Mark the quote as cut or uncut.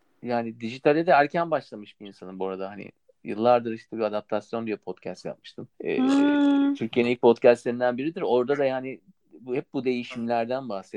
cut